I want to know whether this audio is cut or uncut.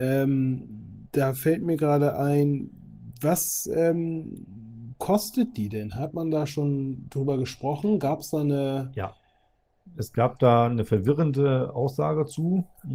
uncut